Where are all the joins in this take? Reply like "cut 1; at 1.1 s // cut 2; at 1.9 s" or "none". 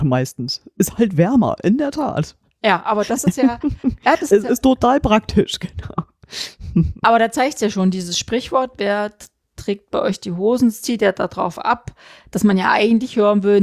none

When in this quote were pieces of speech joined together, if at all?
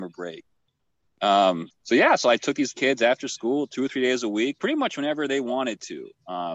cut 1; at 1.7 s

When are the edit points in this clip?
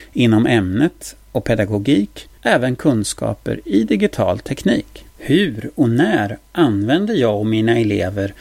cut 1; at 2.4 s // cut 2; at 5.1 s

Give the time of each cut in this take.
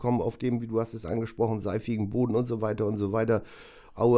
none

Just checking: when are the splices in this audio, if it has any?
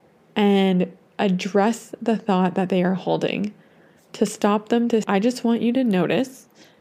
cut 1; at 5.0 s

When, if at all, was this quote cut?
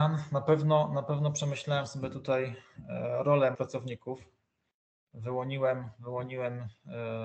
cut 1; at 3.5 s

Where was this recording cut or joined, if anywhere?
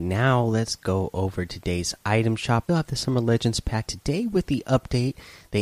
cut 1; at 2.7 s // cut 2; at 3.9 s

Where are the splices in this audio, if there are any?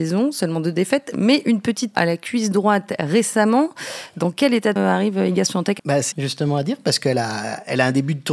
cut 1; at 1.9 s // cut 2; at 4.8 s // cut 3; at 5.8 s // cut 4; at 6.1 s

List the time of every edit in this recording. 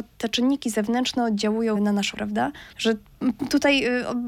cut 1; at 1.8 s // cut 2; at 2.1 s // cut 3; at 2.7 s

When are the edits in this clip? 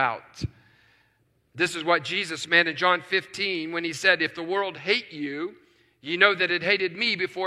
none

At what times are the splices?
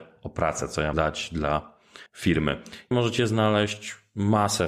cut 1; at 0.9 s // cut 2; at 2.1 s // cut 3; at 2.9 s

